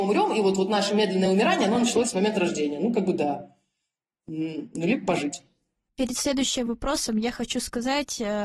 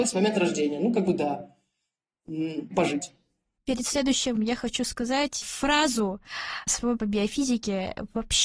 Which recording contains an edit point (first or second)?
second